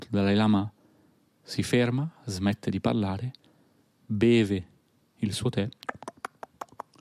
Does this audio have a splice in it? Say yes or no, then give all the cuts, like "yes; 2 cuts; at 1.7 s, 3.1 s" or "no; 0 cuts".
no; 0 cuts